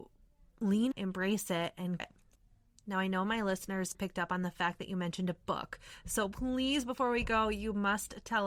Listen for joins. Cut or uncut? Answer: cut